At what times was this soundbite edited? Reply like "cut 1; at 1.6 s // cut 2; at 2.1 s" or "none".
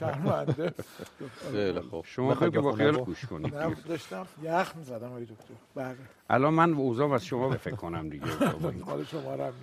cut 1; at 2.5 s // cut 2; at 2.9 s // cut 3; at 3.8 s // cut 4; at 4.3 s // cut 5; at 5.6 s // cut 6; at 7.5 s